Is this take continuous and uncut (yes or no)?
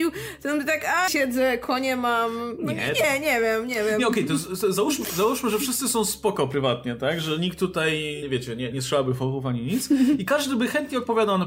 no